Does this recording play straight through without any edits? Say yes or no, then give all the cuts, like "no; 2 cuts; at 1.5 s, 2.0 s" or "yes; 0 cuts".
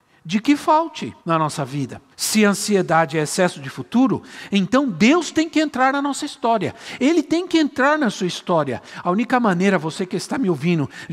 no; 2 cuts; at 1.2 s, 2.1 s